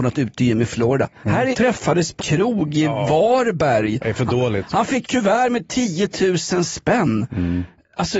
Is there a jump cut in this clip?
yes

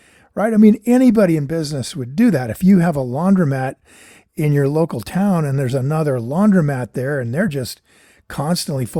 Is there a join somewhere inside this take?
no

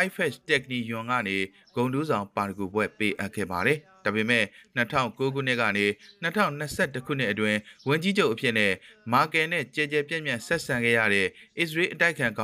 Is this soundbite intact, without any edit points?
yes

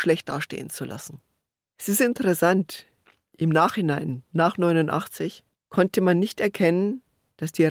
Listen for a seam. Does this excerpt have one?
no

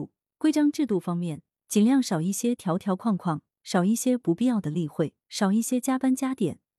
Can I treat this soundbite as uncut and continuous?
no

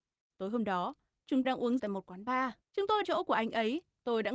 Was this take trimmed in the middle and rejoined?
yes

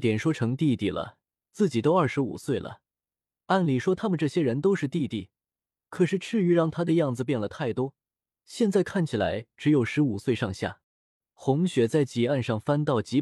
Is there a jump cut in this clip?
yes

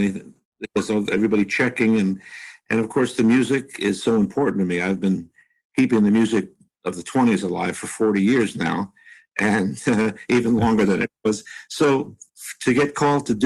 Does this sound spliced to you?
no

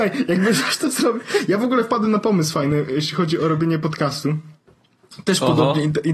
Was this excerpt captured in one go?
yes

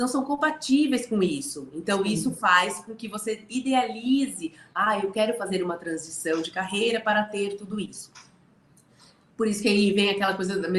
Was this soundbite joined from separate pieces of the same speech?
no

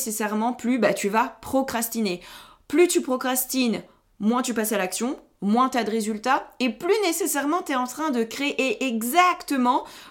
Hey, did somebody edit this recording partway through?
no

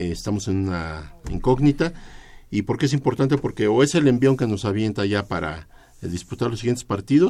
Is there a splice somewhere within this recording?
no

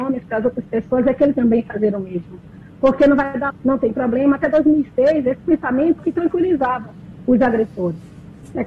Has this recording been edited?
yes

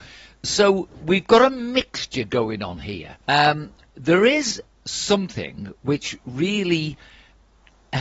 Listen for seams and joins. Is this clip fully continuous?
no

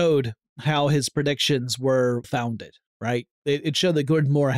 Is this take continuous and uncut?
no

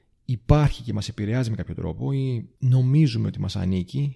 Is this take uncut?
no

